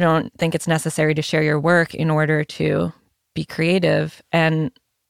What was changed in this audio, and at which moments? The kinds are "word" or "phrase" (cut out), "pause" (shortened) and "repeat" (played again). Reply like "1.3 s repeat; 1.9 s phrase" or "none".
none